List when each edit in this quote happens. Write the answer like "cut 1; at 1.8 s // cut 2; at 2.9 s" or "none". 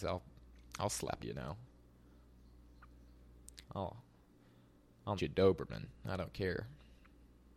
cut 1; at 1.2 s // cut 2; at 3.6 s // cut 3; at 5.2 s